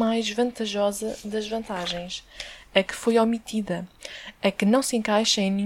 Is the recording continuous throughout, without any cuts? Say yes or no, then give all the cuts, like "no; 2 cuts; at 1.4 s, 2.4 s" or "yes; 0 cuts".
yes; 0 cuts